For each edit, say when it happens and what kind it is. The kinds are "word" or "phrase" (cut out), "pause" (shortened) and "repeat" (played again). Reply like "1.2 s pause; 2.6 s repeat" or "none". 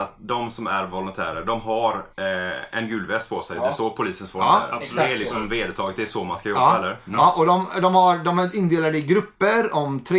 2.1 s pause